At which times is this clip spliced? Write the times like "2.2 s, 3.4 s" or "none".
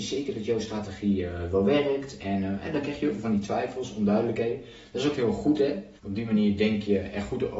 6.0 s